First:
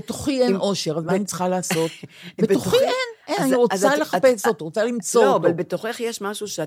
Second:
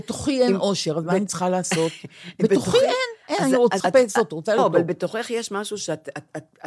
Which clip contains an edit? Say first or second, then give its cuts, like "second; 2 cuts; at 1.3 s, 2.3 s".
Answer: second; 2 cuts; at 3.8 s, 4.6 s